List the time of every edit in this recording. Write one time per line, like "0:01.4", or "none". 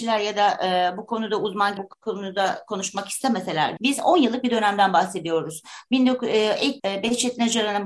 0:01.8
0:03.8
0:06.8